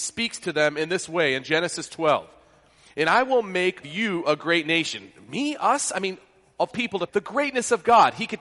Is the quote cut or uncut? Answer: cut